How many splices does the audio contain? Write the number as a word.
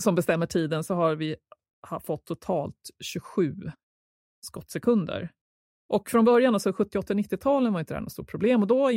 zero